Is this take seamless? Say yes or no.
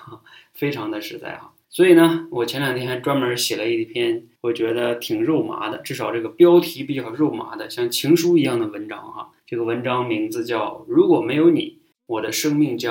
no